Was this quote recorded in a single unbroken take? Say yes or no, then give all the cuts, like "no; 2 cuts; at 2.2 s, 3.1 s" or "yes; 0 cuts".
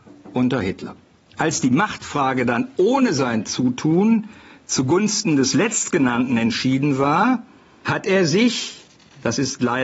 yes; 0 cuts